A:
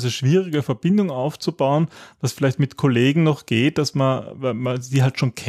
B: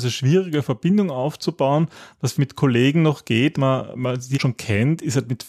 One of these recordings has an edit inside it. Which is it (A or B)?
B